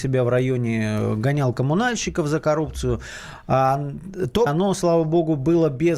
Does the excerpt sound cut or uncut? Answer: cut